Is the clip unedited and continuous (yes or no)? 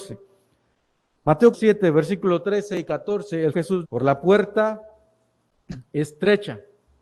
no